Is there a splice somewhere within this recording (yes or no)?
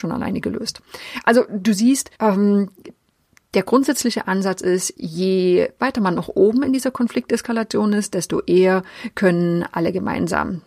yes